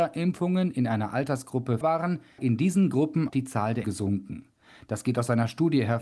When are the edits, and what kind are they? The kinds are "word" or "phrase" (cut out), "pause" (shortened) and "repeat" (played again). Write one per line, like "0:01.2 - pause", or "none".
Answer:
0:01.8 - word
0:02.4 - word
0:03.3 - word
0:03.8 - word